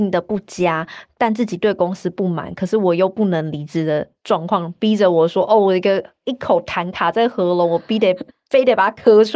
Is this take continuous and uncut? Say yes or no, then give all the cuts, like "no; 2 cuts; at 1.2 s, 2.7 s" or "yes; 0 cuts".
no; 1 cut; at 8.3 s